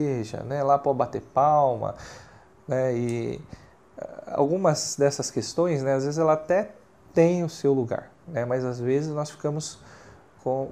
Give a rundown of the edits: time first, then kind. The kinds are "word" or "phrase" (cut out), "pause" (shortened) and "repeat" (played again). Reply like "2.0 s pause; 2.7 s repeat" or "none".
none